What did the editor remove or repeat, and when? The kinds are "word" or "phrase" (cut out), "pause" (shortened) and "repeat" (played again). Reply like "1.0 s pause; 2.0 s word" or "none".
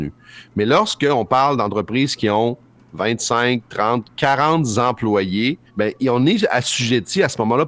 5.7 s pause

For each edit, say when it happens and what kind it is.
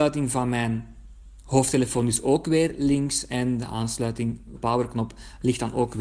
4.6 s word

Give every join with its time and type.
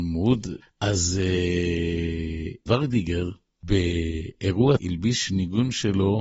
2.7 s word; 4.8 s word

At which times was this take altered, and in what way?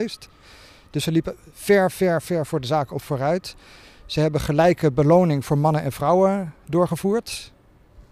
none

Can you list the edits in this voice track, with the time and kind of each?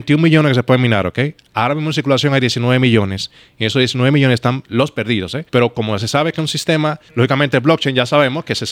5.5 s pause; 7.1 s pause

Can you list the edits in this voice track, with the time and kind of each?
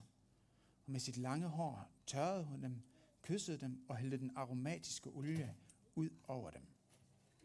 none

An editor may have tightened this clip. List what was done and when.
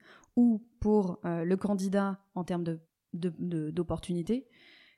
2.8 s pause

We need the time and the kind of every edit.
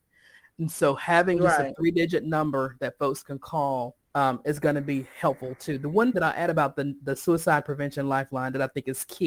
4.0 s pause; 6.1 s word

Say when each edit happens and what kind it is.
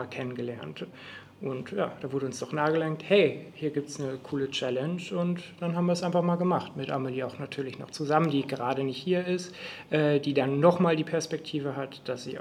none

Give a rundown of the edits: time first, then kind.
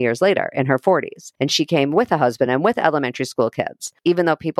none

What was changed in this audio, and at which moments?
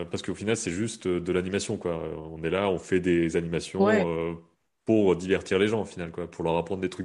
none

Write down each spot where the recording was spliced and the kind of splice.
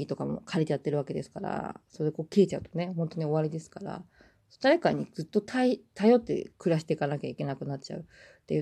none

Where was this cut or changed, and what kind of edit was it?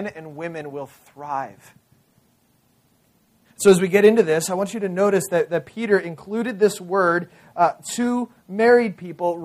none

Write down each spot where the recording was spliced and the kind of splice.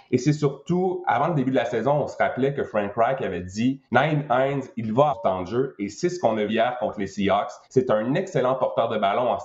3.8 s pause; 5.1 s word; 6.5 s word; 7.6 s pause

